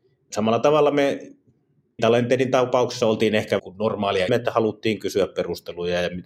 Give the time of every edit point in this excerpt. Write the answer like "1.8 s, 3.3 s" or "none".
2.0 s, 3.6 s, 4.3 s